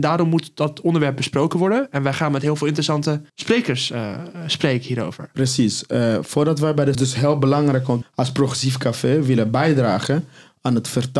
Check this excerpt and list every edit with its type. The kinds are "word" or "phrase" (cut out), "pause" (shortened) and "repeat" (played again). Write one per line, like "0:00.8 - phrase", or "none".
0:03.3 - pause
0:06.9 - phrase
0:08.0 - phrase